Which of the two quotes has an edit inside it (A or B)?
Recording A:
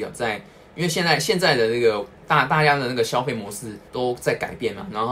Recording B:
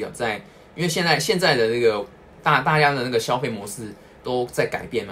A